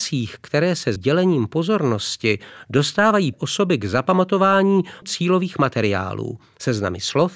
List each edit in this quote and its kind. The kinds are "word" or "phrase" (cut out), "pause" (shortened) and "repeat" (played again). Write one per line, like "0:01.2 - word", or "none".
0:01.0 - word
0:03.3 - word
0:05.0 - word